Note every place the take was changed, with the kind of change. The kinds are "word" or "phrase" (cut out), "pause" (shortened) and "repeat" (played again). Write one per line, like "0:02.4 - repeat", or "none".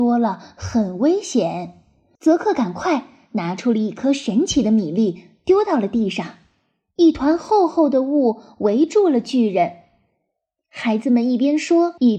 none